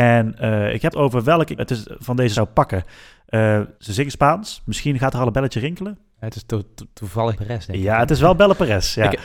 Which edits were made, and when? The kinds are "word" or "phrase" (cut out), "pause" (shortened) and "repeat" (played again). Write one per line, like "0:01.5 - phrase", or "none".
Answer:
0:00.9 - word
0:01.6 - word
0:02.3 - word
0:03.8 - pause
0:07.3 - phrase

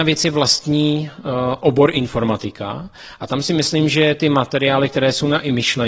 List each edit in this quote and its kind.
none

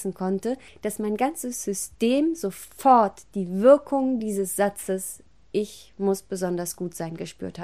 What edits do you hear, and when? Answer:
none

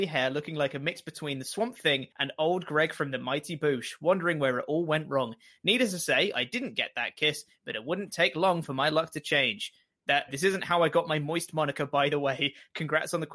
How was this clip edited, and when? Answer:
0:02.1 - pause
0:10.3 - word

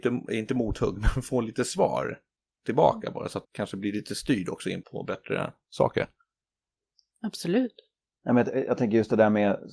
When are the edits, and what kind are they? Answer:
0:03.4 - word
0:04.8 - word

